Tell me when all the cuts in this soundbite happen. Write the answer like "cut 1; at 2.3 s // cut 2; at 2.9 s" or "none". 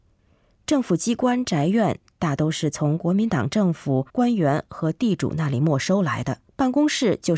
cut 1; at 4.1 s // cut 2; at 6.5 s